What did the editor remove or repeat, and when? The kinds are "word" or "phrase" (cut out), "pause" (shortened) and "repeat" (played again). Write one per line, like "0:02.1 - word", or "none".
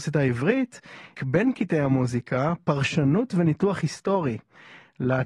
0:01.1 - word